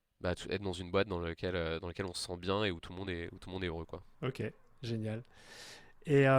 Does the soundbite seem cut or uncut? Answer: uncut